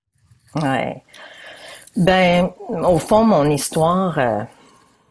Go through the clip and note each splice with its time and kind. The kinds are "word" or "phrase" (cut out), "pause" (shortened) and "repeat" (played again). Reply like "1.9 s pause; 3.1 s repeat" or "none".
none